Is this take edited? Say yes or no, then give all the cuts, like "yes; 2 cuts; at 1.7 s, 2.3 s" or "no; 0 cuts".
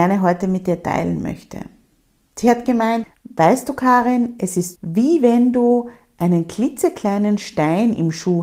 yes; 1 cut; at 4.8 s